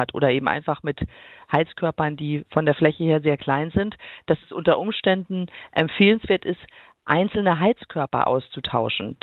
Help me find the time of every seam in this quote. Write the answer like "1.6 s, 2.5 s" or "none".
none